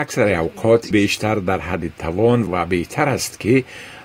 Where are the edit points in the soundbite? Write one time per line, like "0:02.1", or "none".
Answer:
0:00.9
0:02.5